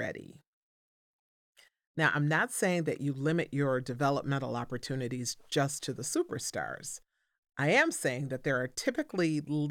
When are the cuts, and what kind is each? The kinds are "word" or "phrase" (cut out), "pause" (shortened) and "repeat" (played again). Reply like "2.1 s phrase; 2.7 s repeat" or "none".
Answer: none